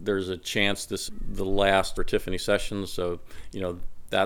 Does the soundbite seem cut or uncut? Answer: cut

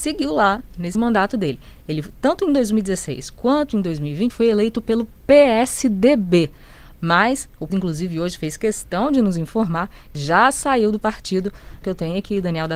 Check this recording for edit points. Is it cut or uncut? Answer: cut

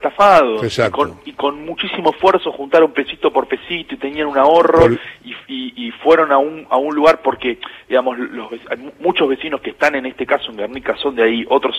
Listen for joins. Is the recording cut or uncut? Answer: uncut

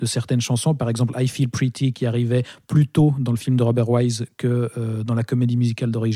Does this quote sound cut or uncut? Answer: uncut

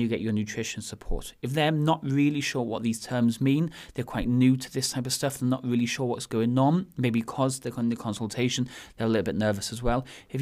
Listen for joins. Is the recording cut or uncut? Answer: uncut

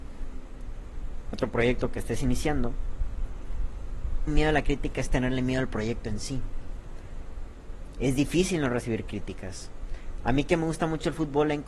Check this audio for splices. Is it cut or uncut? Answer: cut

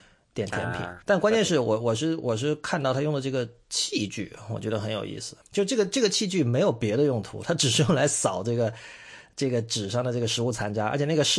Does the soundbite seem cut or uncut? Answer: cut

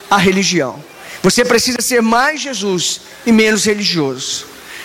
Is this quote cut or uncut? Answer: uncut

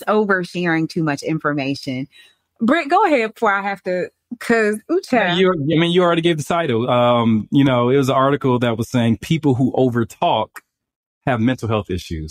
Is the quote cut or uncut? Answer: uncut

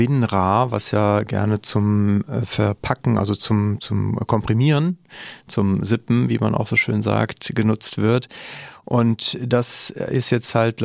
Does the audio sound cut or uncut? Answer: uncut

